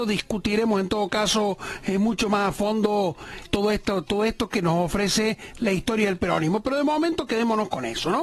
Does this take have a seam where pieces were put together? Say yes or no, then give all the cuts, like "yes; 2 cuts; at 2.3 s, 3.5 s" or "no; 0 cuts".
yes; 1 cut; at 3.4 s